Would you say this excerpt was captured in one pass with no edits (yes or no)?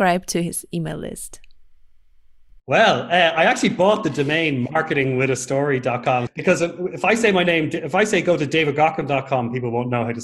yes